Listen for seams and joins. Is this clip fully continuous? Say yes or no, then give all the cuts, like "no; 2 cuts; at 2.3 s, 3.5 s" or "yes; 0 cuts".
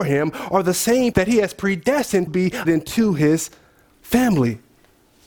no; 3 cuts; at 1.1 s, 2.3 s, 2.6 s